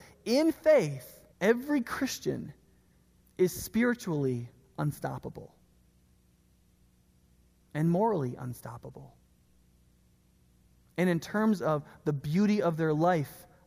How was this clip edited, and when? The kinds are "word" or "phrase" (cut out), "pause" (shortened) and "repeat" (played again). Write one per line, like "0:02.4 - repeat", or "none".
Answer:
0:01.3 - pause